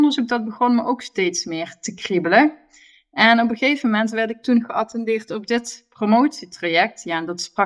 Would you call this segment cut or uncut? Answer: uncut